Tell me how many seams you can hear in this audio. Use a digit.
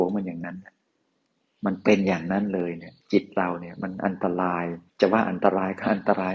2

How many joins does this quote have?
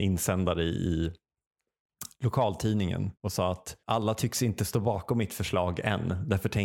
2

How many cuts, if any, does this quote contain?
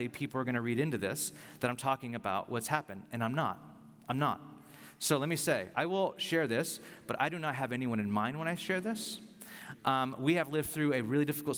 0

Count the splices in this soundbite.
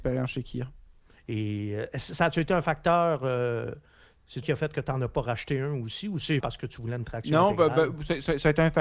2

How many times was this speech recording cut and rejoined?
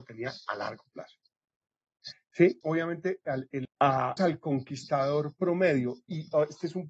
3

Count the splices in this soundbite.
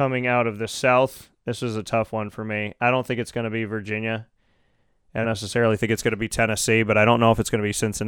1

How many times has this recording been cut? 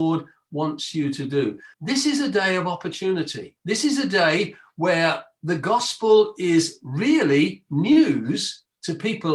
2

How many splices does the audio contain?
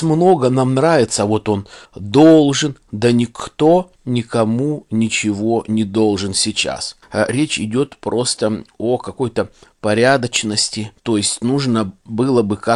1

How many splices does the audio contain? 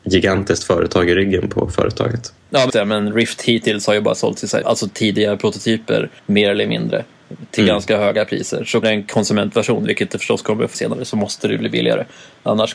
5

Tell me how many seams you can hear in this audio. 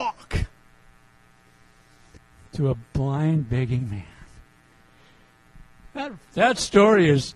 0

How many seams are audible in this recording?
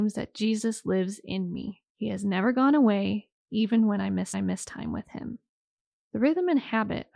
3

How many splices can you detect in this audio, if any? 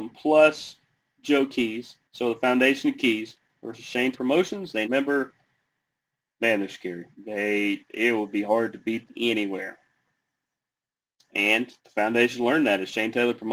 6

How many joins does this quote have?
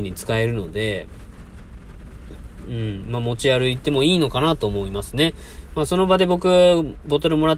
0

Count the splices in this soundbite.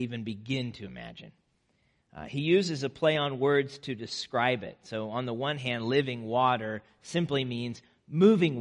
0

